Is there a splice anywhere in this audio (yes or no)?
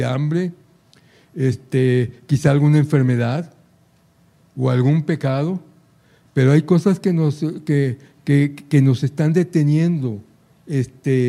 no